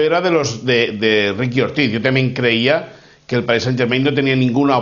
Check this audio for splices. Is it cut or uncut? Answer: uncut